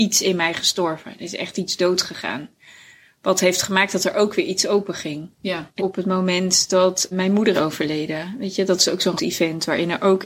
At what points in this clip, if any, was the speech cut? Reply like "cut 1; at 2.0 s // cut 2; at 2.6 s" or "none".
cut 1; at 5.8 s // cut 2; at 7.1 s // cut 3; at 7.5 s // cut 4; at 9.2 s